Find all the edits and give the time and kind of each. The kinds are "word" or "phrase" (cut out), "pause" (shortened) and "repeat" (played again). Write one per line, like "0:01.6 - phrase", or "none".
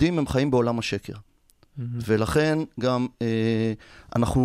none